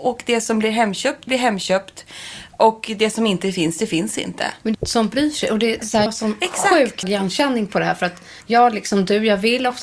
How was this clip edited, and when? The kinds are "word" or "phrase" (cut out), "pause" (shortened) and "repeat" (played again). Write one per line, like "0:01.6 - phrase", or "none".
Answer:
0:01.3 - word
0:04.7 - phrase
0:06.1 - word
0:07.0 - word
0:08.4 - pause